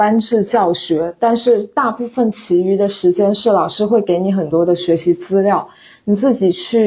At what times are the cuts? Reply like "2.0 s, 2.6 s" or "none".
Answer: none